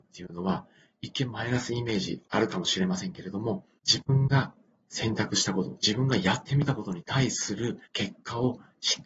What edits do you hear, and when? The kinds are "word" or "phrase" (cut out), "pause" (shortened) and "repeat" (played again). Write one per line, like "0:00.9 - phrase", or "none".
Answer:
0:03.8 - pause
0:07.8 - pause